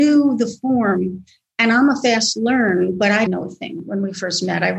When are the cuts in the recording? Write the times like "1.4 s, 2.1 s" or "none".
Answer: 3.3 s